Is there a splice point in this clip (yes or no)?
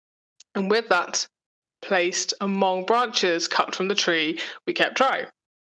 no